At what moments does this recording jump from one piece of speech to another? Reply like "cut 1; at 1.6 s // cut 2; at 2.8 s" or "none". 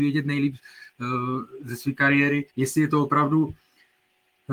cut 1; at 2.5 s